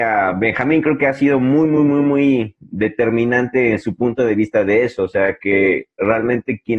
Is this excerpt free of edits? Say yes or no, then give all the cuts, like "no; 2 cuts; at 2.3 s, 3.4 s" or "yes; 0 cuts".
yes; 0 cuts